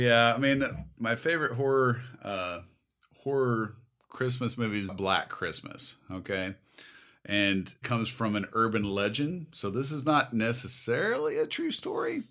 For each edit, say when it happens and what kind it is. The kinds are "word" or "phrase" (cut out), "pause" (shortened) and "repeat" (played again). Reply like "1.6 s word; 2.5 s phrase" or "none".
0.9 s word; 7.8 s phrase